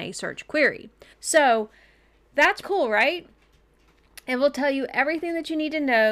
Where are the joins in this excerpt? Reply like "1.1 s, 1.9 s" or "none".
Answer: 1.1 s, 2.6 s